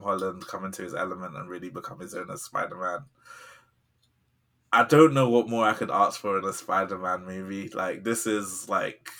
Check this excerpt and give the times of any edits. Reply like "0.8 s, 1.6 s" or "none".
none